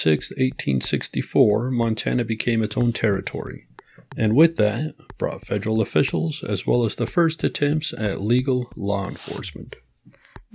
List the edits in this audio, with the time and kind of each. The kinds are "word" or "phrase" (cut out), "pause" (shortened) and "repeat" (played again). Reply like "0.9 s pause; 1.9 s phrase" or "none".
none